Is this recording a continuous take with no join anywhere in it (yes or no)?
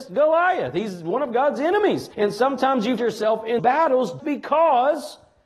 no